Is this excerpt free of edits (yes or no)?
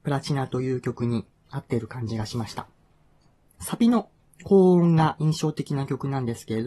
yes